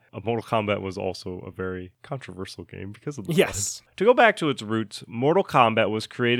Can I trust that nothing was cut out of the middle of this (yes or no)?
yes